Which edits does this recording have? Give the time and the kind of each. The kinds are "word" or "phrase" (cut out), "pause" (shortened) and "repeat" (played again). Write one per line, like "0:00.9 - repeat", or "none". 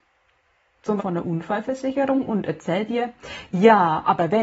0:01.0 - word